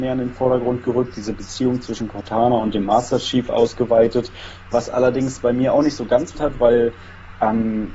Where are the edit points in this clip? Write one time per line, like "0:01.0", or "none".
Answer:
0:06.3